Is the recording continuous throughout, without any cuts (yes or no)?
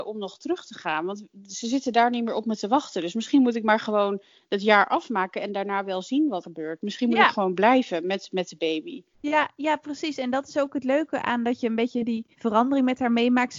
no